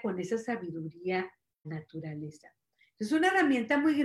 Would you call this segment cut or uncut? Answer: cut